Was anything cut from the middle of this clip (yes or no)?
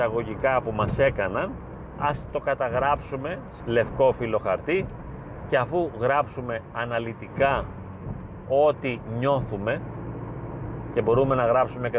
yes